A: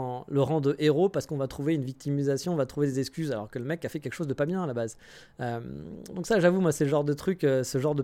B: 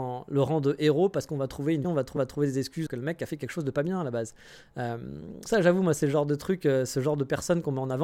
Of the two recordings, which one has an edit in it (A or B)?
B